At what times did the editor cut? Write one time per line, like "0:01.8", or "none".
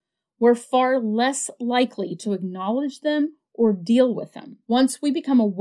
0:02.2
0:04.6